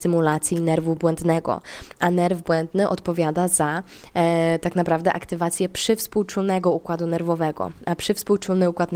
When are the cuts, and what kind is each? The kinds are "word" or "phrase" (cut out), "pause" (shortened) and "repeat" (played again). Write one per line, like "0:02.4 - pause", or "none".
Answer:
none